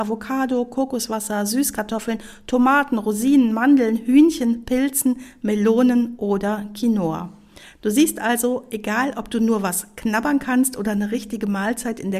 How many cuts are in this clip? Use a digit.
0